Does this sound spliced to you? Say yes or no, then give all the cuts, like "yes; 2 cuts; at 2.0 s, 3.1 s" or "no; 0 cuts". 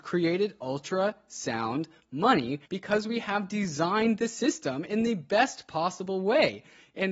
yes; 1 cut; at 2.7 s